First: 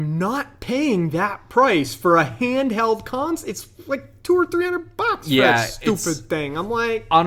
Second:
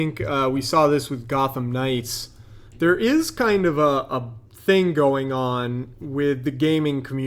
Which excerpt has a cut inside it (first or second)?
second